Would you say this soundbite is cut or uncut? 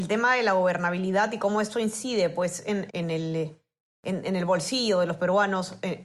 cut